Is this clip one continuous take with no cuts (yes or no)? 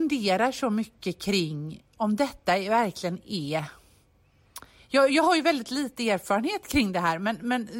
yes